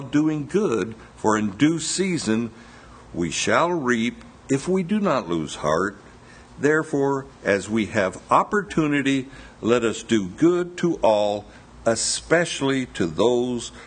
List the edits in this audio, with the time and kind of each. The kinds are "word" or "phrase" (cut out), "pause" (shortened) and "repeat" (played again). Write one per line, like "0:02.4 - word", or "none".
none